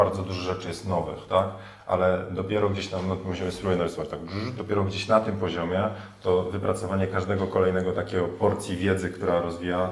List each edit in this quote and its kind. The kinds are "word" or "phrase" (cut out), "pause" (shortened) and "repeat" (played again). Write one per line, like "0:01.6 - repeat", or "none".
none